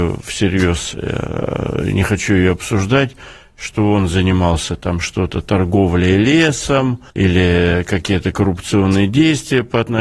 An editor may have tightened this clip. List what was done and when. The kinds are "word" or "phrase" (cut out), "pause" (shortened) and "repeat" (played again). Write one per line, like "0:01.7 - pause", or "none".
0:07.1 - pause